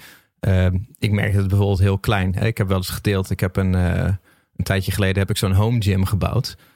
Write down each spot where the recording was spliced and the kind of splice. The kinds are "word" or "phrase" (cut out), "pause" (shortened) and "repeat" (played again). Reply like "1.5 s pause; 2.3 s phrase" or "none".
none